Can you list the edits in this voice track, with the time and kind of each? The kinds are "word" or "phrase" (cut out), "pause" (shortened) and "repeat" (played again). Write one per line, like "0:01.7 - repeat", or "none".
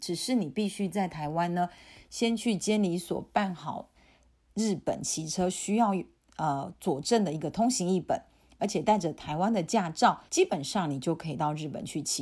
0:10.3 - pause

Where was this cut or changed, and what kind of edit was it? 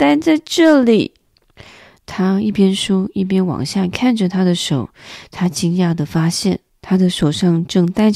0:01.6 - pause

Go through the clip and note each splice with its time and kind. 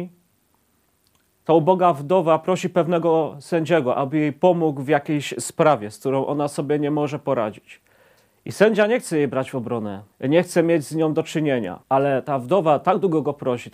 0:10.1 - pause
0:11.8 - pause

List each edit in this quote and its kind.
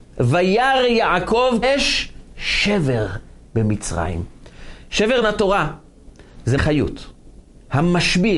0:01.6 - word
0:05.2 - word
0:06.6 - phrase

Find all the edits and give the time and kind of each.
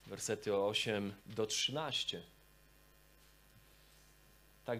0:01.2 - pause

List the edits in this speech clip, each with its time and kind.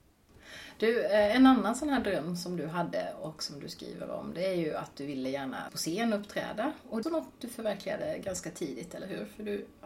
0:05.7 - word
0:07.0 - phrase

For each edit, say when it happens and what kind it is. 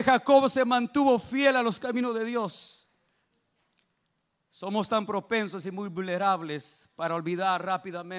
none

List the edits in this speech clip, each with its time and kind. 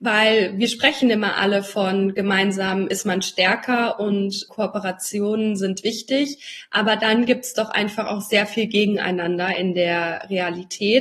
none

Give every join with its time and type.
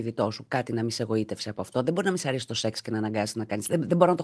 none

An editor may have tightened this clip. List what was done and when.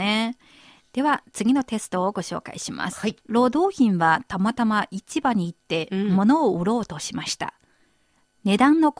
0:03.2 - pause

